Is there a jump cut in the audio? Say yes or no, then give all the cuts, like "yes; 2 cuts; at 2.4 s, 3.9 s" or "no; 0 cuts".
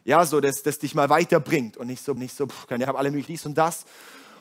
yes; 3 cuts; at 2.2 s, 2.8 s, 3.3 s